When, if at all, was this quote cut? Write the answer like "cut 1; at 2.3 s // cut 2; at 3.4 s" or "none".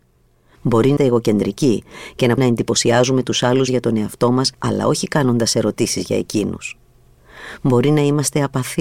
cut 1; at 1.0 s // cut 2; at 2.4 s // cut 3; at 3.7 s // cut 4; at 4.5 s